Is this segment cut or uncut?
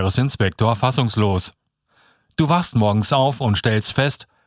uncut